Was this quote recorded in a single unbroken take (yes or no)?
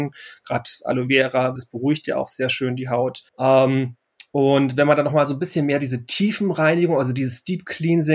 no